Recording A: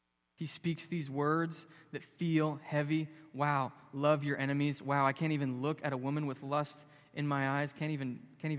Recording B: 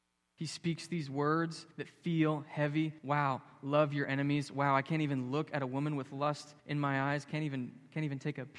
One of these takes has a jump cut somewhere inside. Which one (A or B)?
B